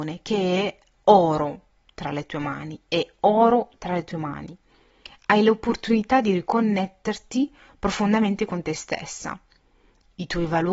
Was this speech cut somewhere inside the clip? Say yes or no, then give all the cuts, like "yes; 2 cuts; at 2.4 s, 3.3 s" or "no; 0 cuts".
no; 0 cuts